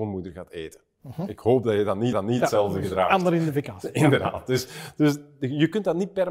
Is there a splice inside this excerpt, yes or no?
yes